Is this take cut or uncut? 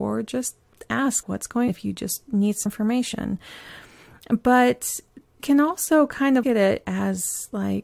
cut